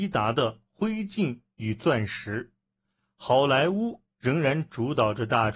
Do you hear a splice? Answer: no; 0 cuts

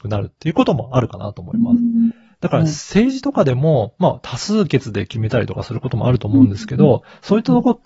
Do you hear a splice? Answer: no; 0 cuts

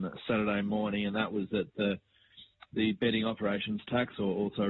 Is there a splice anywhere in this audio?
no; 0 cuts

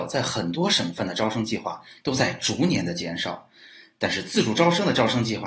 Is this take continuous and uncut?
yes; 0 cuts

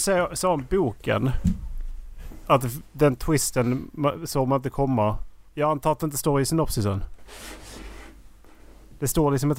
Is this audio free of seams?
no; 1 cut; at 5.5 s

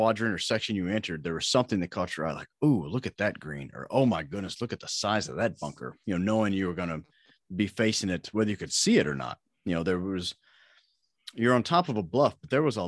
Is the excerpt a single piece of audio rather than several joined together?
yes; 0 cuts

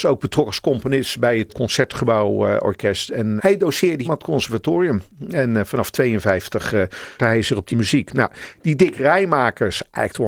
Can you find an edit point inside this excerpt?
yes; 5 cuts; at 1.5 s, 3.4 s, 4.0 s, 7.2 s, 7.7 s

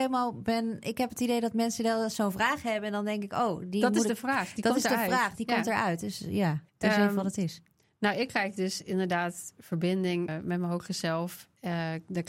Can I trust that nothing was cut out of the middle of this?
no; 2 cuts; at 6.7 s, 10.3 s

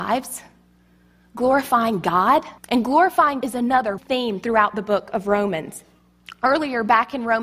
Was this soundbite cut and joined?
yes; 3 cuts; at 2.6 s, 3.4 s, 4.0 s

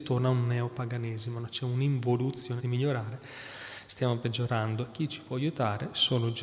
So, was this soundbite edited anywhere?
yes; 1 cut; at 2.6 s

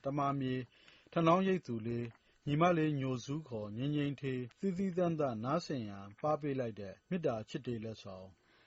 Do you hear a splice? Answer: yes; 2 cuts; at 4.5 s, 7.0 s

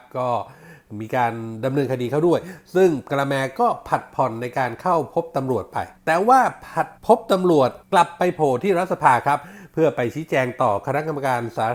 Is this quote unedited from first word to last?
no; 3 cuts; at 6.0 s, 7.0 s, 7.8 s

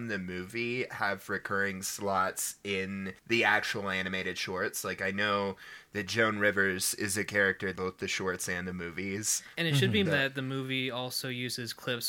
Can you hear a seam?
yes; 4 cuts; at 3.2 s, 7.7 s, 9.5 s, 10.0 s

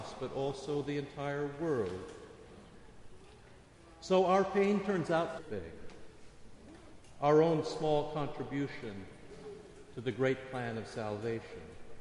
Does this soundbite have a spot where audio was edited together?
yes; 1 cut; at 5.4 s

